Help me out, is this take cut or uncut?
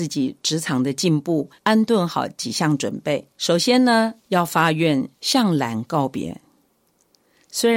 cut